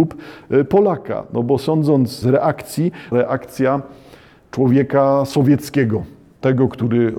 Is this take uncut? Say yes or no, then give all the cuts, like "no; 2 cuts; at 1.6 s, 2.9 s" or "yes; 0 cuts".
no; 2 cuts; at 2.2 s, 3.1 s